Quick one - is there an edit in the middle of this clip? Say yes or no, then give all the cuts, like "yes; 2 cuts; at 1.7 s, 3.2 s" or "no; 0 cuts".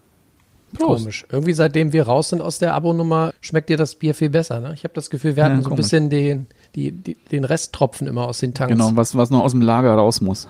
yes; 2 cuts; at 3.3 s, 6.7 s